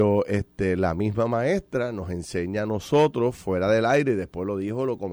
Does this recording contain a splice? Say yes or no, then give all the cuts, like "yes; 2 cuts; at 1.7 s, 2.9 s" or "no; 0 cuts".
no; 0 cuts